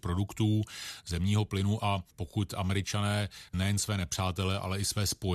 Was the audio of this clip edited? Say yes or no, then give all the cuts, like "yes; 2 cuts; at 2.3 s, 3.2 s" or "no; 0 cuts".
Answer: yes; 2 cuts; at 2.1 s, 3.5 s